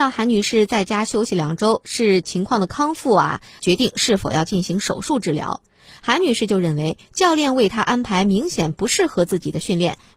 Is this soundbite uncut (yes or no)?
yes